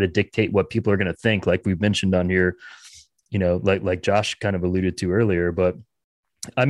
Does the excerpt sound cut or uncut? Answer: uncut